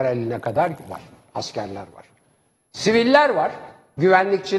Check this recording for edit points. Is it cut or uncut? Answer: uncut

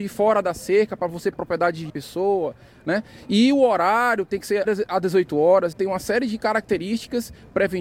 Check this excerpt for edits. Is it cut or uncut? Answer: cut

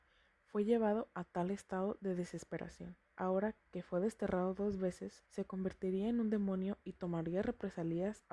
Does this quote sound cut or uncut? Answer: cut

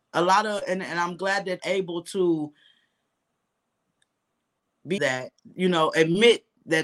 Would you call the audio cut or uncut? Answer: cut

